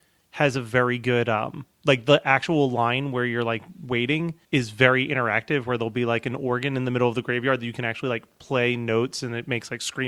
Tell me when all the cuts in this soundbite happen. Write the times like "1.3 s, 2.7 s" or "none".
1.7 s, 4.4 s